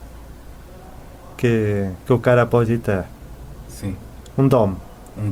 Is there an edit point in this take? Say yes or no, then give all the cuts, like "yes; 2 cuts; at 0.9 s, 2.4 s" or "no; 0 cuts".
no; 0 cuts